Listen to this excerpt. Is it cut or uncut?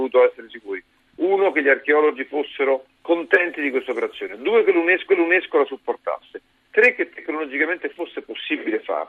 cut